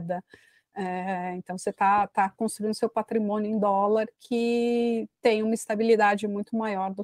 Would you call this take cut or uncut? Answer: uncut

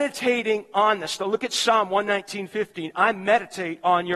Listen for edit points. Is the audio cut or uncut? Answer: uncut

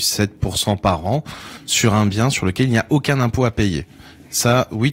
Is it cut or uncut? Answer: uncut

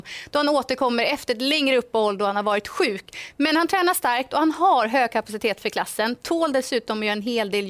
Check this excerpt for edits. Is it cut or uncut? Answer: uncut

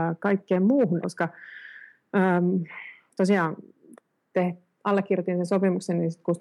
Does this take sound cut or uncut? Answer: cut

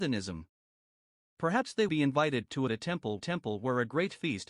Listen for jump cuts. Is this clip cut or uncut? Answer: cut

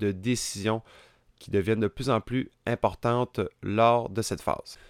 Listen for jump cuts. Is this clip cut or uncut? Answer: uncut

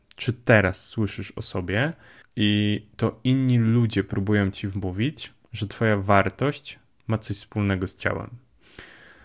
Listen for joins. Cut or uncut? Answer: cut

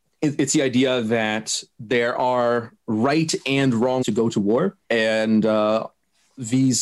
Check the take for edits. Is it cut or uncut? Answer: cut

